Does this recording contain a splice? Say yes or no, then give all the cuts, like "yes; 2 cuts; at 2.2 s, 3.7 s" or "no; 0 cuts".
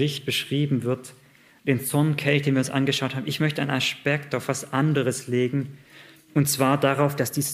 no; 0 cuts